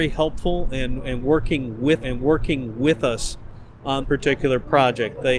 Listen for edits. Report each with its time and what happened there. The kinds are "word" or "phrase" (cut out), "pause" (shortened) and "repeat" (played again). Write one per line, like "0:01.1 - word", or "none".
0:02.0 - repeat
0:04.0 - word

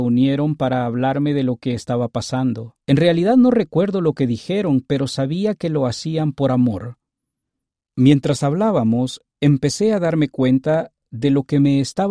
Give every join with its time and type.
0:02.8 - pause

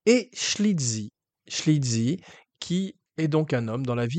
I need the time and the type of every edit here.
none

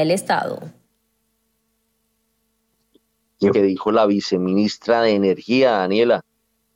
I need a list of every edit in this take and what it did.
0:03.5 - phrase

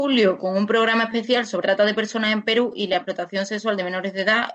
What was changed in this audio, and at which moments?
0:01.6 - word

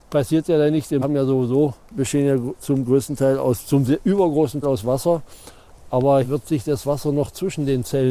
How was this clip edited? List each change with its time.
0:01.0 - word
0:02.6 - word
0:04.6 - word
0:06.2 - word

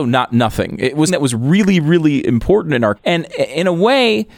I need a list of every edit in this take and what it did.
0:01.1 - word
0:03.0 - word

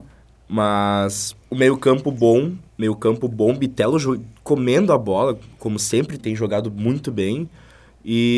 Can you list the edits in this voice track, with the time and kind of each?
0:01.4 - pause
0:02.7 - pause
0:06.2 - word

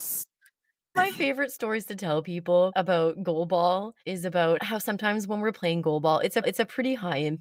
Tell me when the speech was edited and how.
0:00.9 - phrase
0:04.0 - pause
0:06.4 - repeat

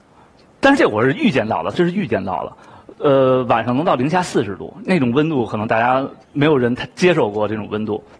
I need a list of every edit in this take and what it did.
0:01.7 - phrase
0:06.2 - pause

